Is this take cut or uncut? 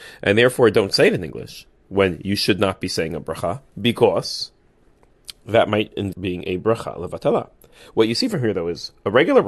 cut